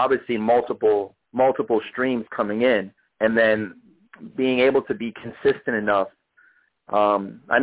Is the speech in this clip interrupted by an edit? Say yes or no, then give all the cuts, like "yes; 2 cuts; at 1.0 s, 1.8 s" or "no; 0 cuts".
yes; 1 cut; at 1.2 s